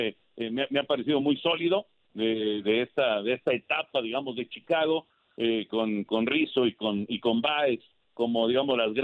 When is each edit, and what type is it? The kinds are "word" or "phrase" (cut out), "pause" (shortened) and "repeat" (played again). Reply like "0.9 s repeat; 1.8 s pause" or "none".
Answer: none